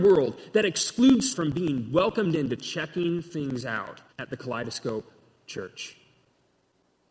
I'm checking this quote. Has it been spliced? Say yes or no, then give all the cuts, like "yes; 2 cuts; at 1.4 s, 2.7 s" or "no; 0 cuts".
yes; 2 cuts; at 1.3 s, 4.1 s